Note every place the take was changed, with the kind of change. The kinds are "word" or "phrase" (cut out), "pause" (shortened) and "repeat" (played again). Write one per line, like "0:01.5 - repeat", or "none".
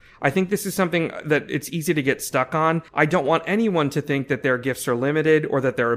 0:02.9 - pause

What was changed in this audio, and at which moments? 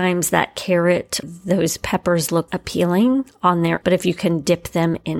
0:01.2 - word
0:02.5 - word
0:03.8 - word

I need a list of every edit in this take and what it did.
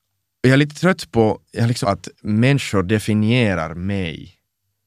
0:01.8 - phrase
0:02.1 - pause

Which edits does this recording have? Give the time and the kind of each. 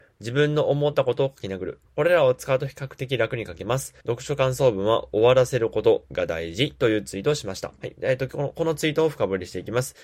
0:01.9 - pause
0:04.0 - pause
0:07.8 - pause

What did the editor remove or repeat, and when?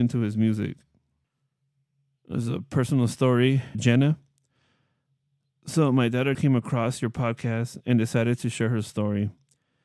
0:03.7 - word
0:06.3 - word

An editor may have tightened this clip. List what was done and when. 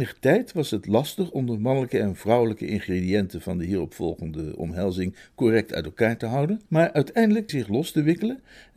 0:06.7 - pause
0:07.5 - phrase

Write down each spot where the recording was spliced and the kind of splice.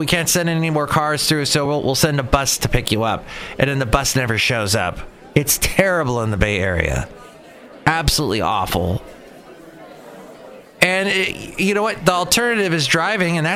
none

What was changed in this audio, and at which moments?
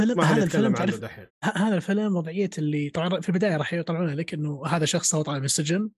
0:01.3 - pause

